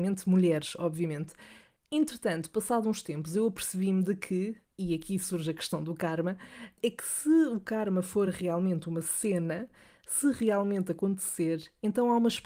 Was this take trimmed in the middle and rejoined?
no; 0 cuts

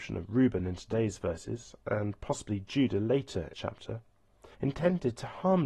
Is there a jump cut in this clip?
yes; 2 cuts; at 3.5 s, 4.5 s

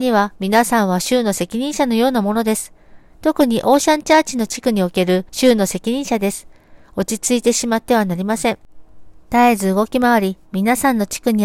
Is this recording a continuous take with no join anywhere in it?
no; 1 cut; at 5.3 s

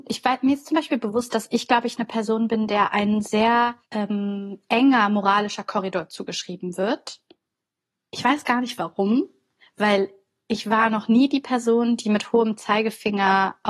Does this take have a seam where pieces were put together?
yes; 1 cut; at 3.8 s

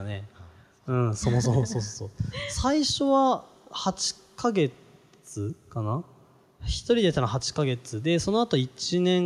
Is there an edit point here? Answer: no; 0 cuts

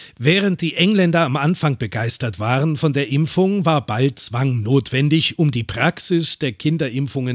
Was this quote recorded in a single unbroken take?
yes; 0 cuts

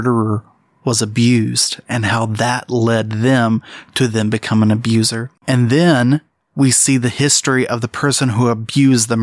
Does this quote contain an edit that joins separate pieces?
yes; 1 cut; at 5.4 s

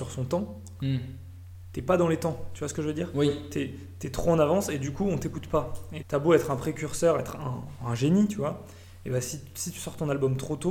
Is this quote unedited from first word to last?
no; 1 cut; at 6.0 s

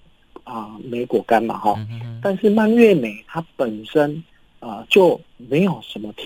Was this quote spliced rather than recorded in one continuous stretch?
no; 0 cuts

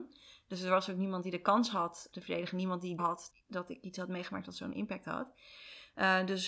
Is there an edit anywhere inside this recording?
yes; 3 cuts; at 2.1 s, 3.0 s, 3.3 s

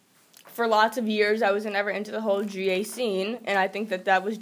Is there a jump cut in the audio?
no; 0 cuts

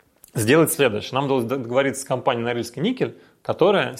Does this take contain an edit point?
no; 0 cuts

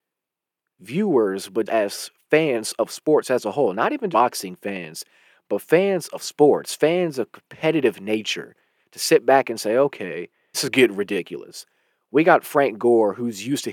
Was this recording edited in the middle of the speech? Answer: yes; 3 cuts; at 1.7 s, 4.1 s, 10.5 s

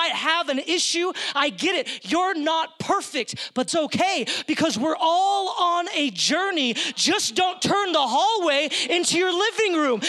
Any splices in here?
yes; 1 cut; at 3.7 s

